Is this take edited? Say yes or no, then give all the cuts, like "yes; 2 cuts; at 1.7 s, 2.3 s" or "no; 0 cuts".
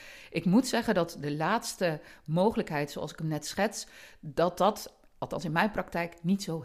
no; 0 cuts